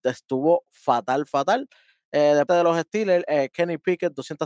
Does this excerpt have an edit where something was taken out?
yes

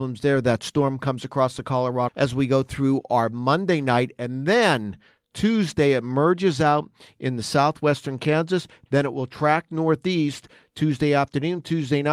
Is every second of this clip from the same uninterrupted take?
no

